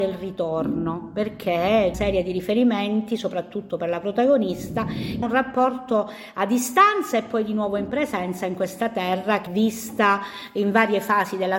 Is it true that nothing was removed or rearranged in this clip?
no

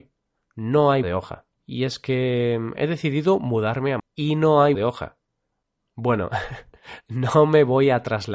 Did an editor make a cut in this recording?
yes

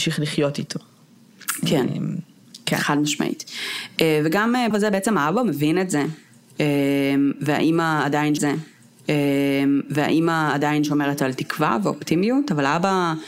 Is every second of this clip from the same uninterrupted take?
no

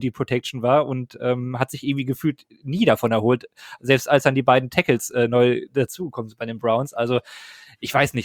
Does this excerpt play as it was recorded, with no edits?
yes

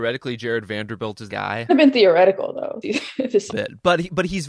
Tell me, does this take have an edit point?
yes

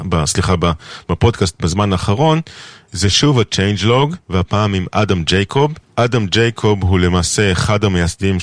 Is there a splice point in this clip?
yes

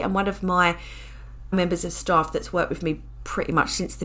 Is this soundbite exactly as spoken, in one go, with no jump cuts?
no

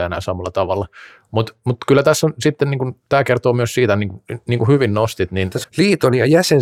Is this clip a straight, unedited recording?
no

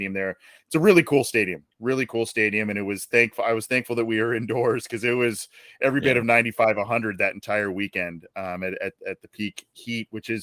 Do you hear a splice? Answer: yes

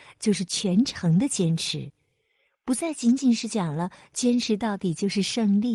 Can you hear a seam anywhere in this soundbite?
no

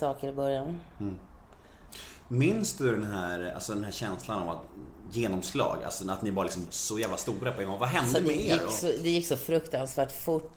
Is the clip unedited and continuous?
no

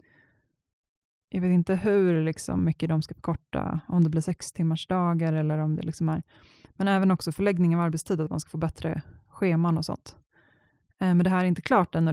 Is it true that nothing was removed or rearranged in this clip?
yes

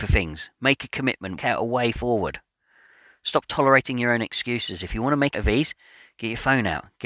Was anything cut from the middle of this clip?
yes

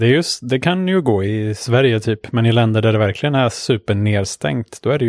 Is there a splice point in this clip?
no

